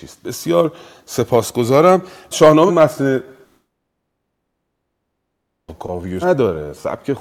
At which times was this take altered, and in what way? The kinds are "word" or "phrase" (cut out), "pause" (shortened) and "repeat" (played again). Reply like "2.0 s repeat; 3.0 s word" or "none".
2.3 s word; 2.7 s word; 6.2 s word